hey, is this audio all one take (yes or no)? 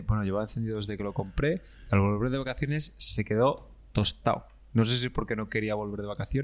no